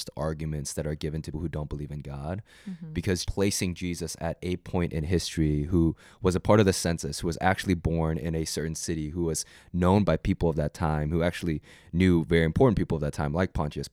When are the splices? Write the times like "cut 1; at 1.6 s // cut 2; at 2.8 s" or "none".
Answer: cut 1; at 1.3 s // cut 2; at 3.3 s